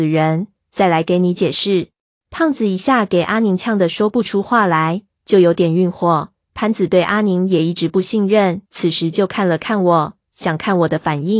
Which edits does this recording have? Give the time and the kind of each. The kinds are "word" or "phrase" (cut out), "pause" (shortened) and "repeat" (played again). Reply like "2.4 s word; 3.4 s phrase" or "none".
2.0 s pause; 8.7 s pause